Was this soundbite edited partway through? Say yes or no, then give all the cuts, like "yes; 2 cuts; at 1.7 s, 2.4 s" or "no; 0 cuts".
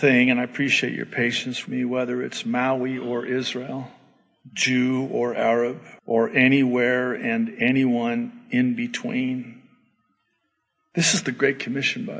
yes; 2 cuts; at 1.7 s, 6.0 s